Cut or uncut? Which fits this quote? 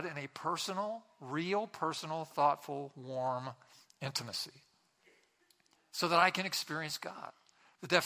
uncut